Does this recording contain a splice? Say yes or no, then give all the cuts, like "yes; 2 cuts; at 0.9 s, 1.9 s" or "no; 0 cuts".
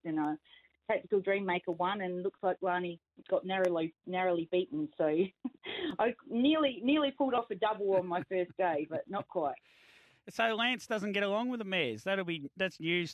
no; 0 cuts